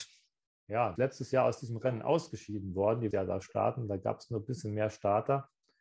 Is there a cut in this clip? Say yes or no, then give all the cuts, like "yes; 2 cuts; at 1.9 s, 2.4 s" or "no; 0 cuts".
yes; 3 cuts; at 1.0 s, 3.1 s, 3.4 s